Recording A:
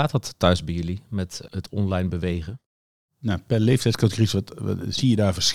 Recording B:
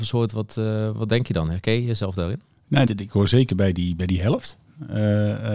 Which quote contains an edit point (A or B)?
B